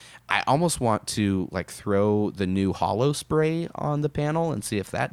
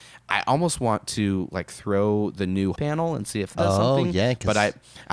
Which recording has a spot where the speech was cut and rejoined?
second; 2 cuts; at 2.7 s, 3.5 s

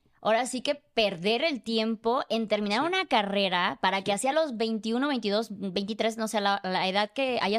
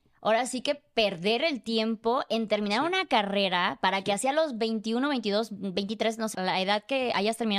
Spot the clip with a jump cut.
second; 1 cut; at 6.3 s

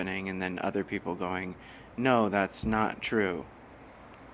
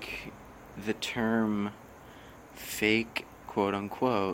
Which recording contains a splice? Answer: second; 1 cut; at 3.4 s

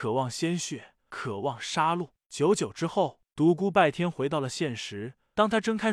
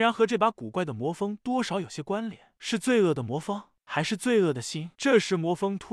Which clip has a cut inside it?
second; 1 cut; at 4.9 s

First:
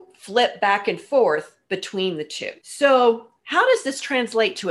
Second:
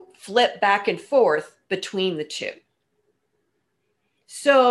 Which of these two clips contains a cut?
first; 1 cut; at 2.6 s

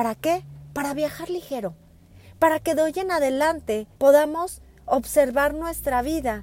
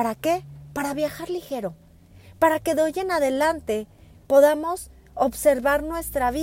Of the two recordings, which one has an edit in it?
first; 1 cut; at 3.9 s

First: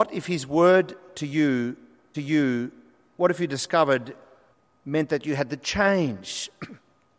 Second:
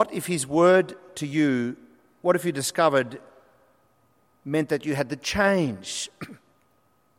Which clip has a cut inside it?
first; 2 cuts; at 2.1 s, 4.5 s

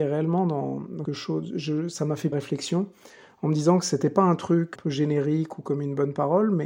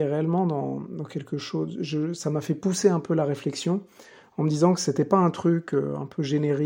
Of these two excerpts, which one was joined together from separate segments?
first; 3 cuts; at 1.1 s, 2.3 s, 4.8 s

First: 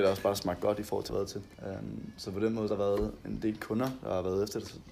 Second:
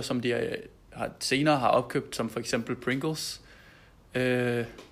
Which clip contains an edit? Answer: first; 3 cuts; at 1.1 s, 1.5 s, 2.7 s

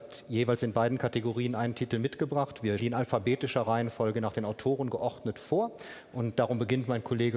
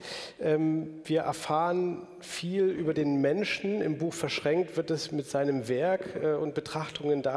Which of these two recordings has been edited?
first; 1 cut; at 2.8 s

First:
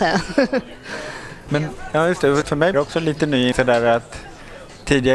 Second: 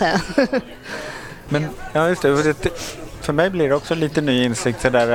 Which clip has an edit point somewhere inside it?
first; 3 cuts; at 2.4 s, 2.7 s, 3.5 s

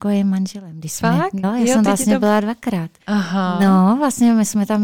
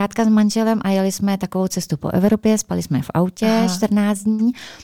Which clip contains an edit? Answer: first; 3 cuts; at 1.4 s, 1.9 s, 3.0 s

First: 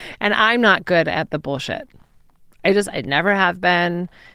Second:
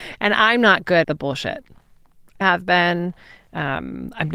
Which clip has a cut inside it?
second; 2 cuts; at 1.0 s, 2.4 s

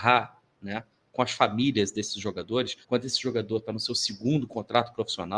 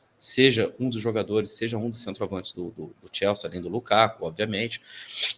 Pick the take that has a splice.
first; 1 cut; at 2.8 s

